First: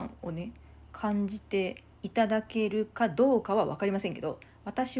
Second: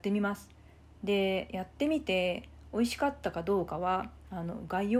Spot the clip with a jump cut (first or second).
first